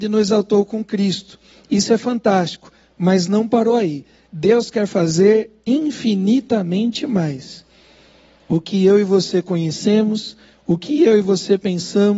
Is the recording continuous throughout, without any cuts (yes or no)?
yes